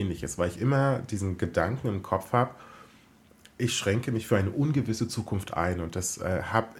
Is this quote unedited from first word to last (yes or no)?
yes